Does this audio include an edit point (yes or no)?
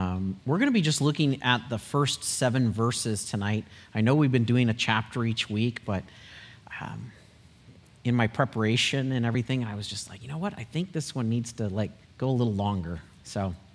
yes